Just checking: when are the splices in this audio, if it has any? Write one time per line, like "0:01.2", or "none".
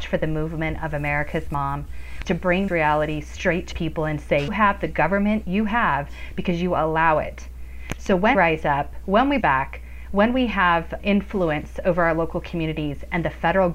0:02.2
0:02.7
0:03.7
0:04.5
0:05.4
0:08.3
0:09.4
0:11.0